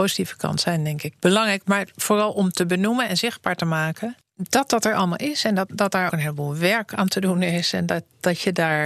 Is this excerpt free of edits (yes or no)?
no